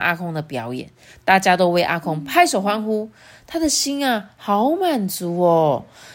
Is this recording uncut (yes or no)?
yes